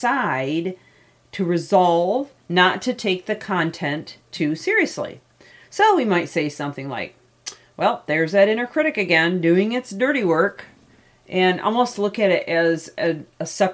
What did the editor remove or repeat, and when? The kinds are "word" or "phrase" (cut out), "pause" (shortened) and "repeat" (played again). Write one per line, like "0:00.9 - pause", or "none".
0:02.4 - pause